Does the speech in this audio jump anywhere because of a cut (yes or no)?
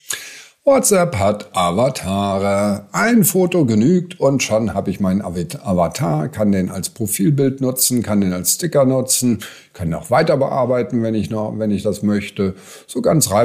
no